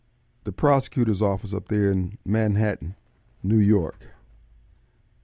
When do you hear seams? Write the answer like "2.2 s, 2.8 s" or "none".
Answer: 3.2 s